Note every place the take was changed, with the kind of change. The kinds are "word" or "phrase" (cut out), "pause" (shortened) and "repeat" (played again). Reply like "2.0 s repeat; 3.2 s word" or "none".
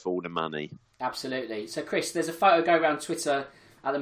none